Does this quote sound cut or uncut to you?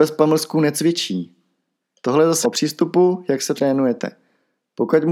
cut